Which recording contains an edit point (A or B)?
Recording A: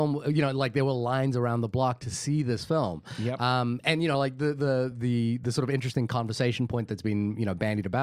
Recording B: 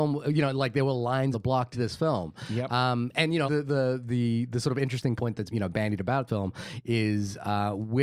B